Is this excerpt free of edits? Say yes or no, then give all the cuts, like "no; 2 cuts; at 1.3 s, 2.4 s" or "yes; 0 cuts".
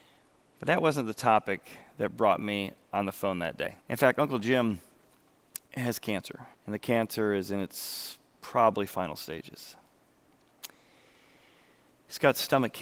no; 3 cuts; at 3.8 s, 5.7 s, 6.5 s